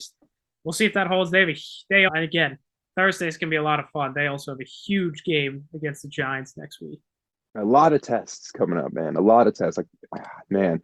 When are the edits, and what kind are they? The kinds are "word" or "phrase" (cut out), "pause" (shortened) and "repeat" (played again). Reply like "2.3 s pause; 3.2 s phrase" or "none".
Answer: 2.1 s word